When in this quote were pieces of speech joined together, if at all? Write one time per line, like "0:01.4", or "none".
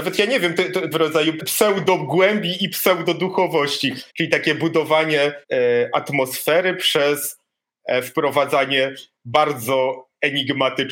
0:00.9
0:01.4
0:04.1
0:05.4